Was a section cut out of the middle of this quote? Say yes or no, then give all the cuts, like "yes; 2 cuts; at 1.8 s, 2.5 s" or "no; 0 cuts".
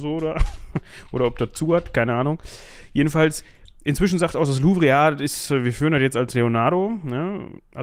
no; 0 cuts